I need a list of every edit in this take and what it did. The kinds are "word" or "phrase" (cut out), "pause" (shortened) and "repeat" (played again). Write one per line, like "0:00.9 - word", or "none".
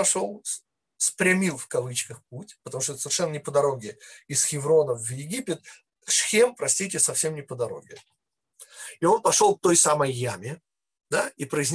none